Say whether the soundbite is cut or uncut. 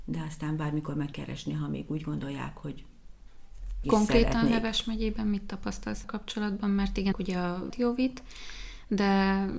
cut